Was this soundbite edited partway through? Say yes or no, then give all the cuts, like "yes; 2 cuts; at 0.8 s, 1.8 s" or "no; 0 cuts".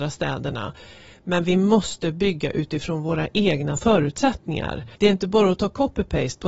yes; 1 cut; at 5.0 s